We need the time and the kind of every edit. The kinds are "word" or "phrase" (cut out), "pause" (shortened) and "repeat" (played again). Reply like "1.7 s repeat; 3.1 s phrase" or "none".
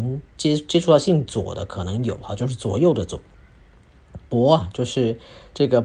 none